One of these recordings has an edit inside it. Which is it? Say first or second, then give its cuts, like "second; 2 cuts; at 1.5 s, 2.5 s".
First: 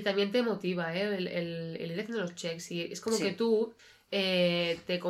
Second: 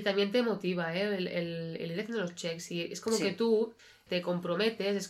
second; 1 cut; at 4.1 s